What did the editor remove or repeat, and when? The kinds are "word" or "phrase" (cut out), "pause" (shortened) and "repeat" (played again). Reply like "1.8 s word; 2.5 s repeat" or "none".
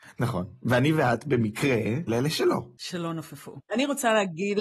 2.1 s word